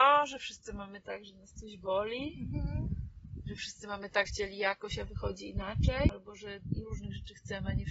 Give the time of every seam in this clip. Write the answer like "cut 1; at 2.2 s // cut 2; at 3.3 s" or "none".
cut 1; at 4.3 s